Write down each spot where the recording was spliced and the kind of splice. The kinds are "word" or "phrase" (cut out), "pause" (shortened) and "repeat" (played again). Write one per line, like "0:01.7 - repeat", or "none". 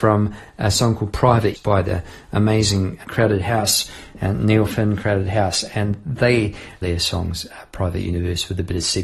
0:01.6 - word
0:03.0 - word
0:06.8 - phrase